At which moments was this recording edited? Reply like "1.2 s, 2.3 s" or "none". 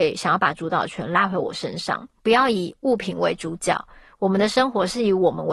2.2 s